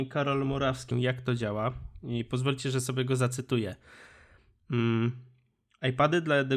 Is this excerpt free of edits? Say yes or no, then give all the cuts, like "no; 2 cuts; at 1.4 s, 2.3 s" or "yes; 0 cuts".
no; 1 cut; at 0.9 s